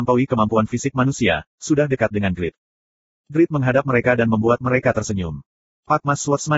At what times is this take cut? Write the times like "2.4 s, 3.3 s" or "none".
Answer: none